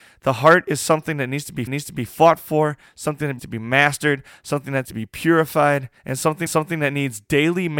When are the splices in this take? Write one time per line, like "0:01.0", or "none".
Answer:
0:01.7
0:03.4
0:04.9
0:06.0
0:06.5